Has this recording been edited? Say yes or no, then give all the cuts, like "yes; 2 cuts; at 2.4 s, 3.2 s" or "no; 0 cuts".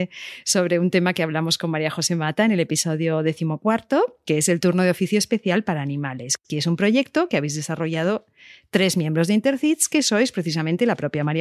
no; 0 cuts